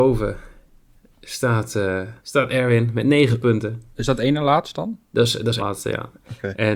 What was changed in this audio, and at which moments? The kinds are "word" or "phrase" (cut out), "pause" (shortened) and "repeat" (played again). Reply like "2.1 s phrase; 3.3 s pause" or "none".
2.2 s pause; 5.6 s phrase